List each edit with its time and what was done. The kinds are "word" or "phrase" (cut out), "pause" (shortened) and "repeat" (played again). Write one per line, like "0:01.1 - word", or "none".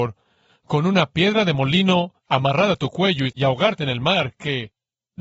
0:02.2 - pause